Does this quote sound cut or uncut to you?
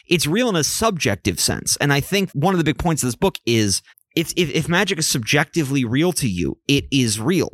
cut